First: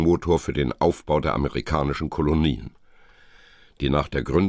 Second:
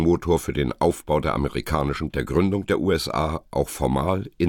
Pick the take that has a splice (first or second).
second